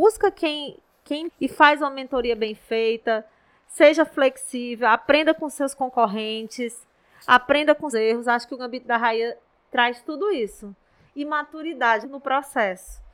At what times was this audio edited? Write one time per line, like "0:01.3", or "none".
0:01.3
0:07.9
0:12.0